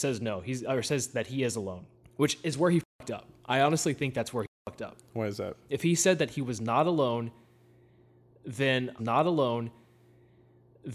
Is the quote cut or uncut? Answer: cut